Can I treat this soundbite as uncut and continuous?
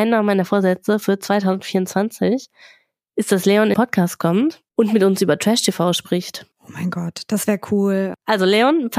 no; 3 cuts; at 3.7 s, 4.7 s, 6.5 s

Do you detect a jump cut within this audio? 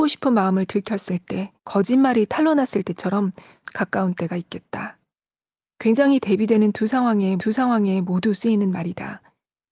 yes; 3 cuts; at 1.6 s, 3.6 s, 7.4 s

